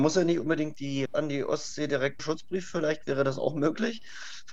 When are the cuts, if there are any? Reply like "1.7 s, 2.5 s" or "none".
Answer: 1.1 s, 2.2 s